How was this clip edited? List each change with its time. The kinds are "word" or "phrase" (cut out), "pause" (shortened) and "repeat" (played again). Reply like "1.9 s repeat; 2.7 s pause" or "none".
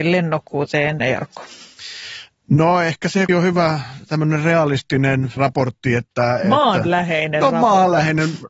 1.0 s word; 3.3 s word; 5.4 s word